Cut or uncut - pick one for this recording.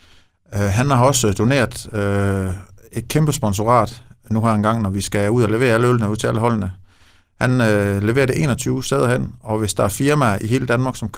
uncut